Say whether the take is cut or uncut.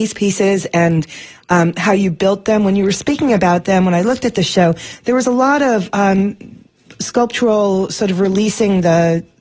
uncut